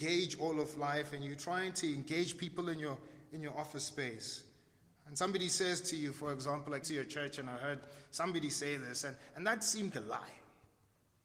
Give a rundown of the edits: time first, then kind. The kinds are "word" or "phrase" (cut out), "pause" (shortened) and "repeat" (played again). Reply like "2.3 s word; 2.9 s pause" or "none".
6.8 s word; 9.9 s word